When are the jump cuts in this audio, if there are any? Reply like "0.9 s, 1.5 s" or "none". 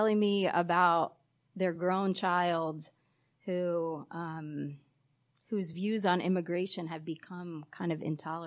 none